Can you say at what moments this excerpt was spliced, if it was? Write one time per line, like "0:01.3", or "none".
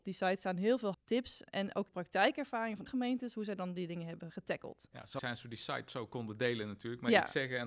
0:00.9
0:01.5
0:01.9
0:02.9
0:04.3
0:05.2